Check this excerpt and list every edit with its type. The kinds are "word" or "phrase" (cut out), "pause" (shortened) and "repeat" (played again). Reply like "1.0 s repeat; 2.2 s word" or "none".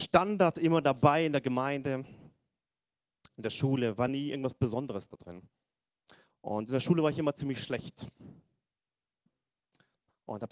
none